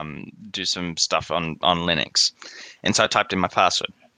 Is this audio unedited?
yes; 0 cuts

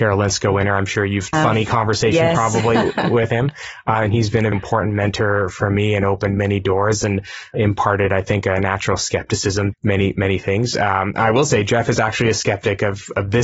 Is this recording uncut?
no; 3 cuts; at 1.3 s, 4.5 s, 9.7 s

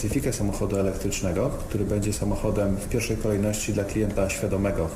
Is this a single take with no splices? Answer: yes; 0 cuts

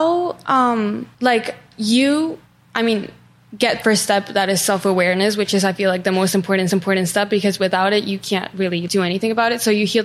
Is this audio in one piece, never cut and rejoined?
no; 5 cuts; at 1.1 s, 2.5 s, 3.8 s, 6.7 s, 8.9 s

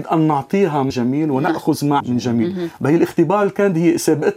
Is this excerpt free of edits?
no; 2 cuts; at 0.9 s, 2.0 s

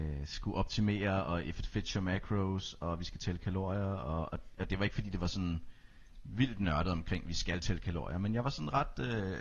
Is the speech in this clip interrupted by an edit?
no; 0 cuts

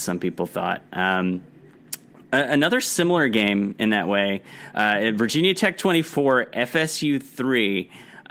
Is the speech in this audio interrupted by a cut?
no; 0 cuts

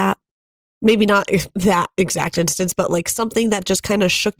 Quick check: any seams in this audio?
no; 0 cuts

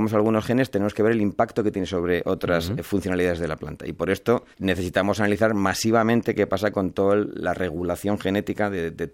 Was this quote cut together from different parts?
yes; 1 cut; at 4.5 s

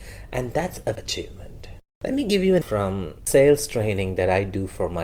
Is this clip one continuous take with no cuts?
no; 2 cuts; at 1.0 s, 2.6 s

